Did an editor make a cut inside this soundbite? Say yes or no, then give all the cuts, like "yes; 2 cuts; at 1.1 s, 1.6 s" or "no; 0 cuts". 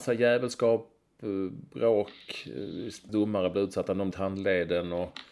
yes; 2 cuts; at 3.1 s, 4.1 s